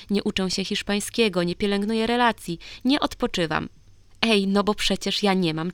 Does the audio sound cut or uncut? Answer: uncut